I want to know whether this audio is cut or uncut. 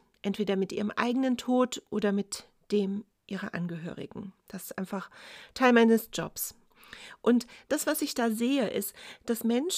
uncut